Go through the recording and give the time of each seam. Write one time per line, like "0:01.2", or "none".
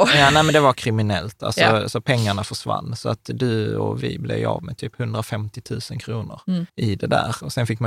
0:06.7